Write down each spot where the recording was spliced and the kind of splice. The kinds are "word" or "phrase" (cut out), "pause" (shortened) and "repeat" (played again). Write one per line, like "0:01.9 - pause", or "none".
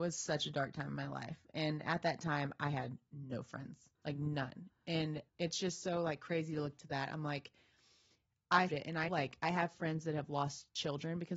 0:03.9 - pause
0:05.3 - pause
0:06.8 - word
0:08.7 - word
0:09.1 - phrase